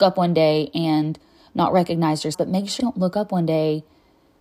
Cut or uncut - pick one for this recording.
cut